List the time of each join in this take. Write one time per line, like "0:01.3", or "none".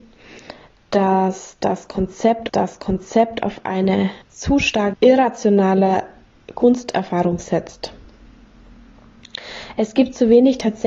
0:02.5
0:04.2
0:04.9